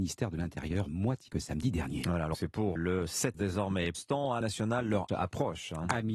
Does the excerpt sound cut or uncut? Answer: cut